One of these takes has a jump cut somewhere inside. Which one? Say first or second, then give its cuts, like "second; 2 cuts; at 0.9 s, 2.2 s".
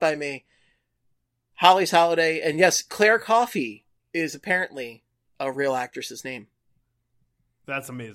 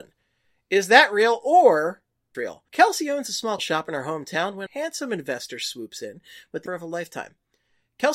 second; 5 cuts; at 2.3 s, 2.7 s, 3.6 s, 4.7 s, 6.7 s